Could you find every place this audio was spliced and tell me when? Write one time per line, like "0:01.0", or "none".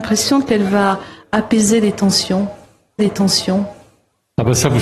0:03.0